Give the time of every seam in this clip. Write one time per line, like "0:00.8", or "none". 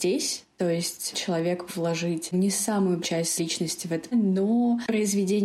0:01.1
0:01.7
0:02.3
0:03.0
0:03.4
0:04.1